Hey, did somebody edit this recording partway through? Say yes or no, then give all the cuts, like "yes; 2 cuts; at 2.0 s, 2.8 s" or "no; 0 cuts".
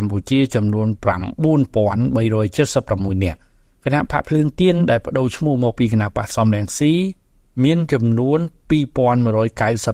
no; 0 cuts